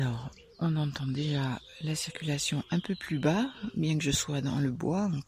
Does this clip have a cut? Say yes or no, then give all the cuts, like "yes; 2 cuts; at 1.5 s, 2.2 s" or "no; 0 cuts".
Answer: no; 0 cuts